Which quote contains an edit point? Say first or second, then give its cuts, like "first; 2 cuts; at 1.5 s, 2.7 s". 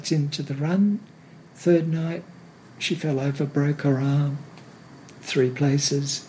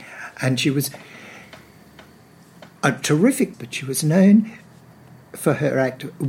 second; 2 cuts; at 2.8 s, 3.5 s